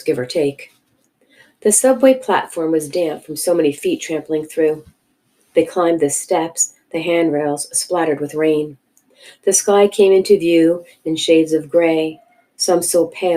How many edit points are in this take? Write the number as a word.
zero